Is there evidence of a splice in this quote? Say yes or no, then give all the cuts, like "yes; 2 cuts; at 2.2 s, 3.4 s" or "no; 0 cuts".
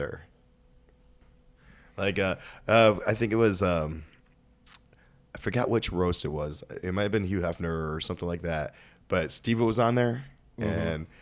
no; 0 cuts